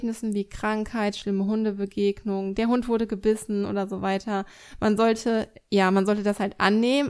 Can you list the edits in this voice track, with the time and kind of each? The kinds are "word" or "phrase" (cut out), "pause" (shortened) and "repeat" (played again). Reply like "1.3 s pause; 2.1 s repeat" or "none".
none